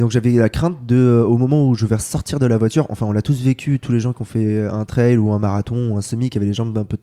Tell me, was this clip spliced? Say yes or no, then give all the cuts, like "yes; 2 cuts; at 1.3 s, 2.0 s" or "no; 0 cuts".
no; 0 cuts